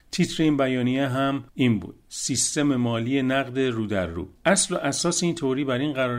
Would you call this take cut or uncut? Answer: cut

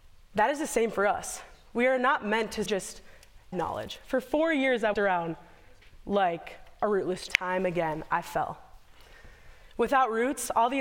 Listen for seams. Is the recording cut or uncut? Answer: cut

